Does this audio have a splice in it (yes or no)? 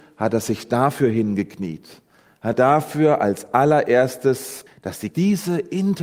yes